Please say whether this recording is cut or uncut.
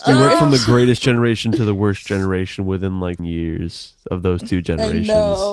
cut